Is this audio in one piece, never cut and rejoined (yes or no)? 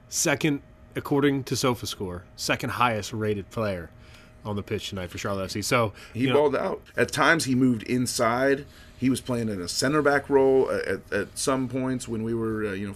no